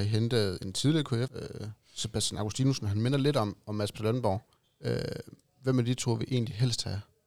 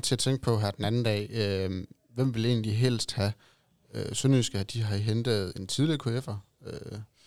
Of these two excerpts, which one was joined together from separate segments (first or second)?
first